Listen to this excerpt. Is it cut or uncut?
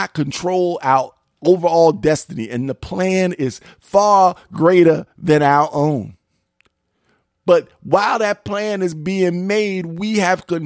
uncut